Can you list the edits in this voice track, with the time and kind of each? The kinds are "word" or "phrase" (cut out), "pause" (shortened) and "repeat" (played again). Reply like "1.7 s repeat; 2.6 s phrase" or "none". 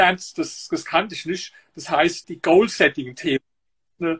2.2 s word

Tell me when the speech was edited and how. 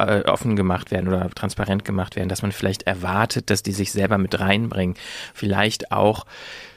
none

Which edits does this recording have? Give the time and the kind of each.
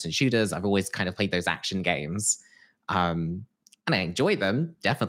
none

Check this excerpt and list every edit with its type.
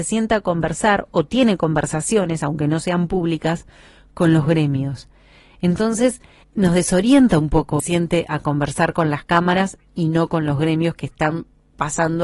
6.4 s word; 7.8 s phrase

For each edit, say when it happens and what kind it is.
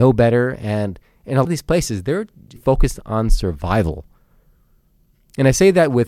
1.4 s word; 2.6 s word

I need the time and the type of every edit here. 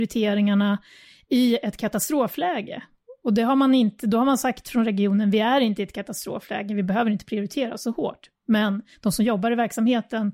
none

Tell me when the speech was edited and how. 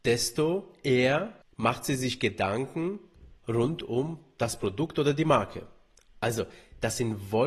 1.4 s pause

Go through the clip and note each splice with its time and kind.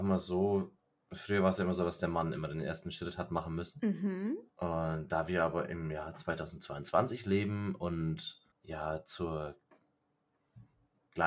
4.5 s pause; 8.5 s pause

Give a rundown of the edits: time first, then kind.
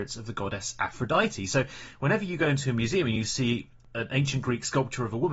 none

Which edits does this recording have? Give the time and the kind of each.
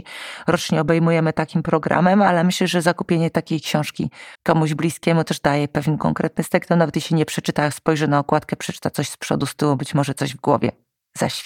4.3 s pause

